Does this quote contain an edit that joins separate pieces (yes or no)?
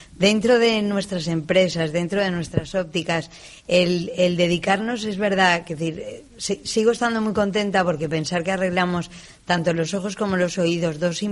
no